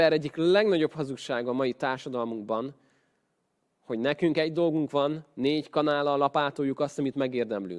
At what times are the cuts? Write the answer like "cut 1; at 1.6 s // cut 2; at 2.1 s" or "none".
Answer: none